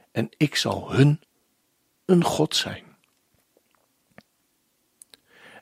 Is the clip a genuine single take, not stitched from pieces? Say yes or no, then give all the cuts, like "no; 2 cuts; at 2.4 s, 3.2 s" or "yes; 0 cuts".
yes; 0 cuts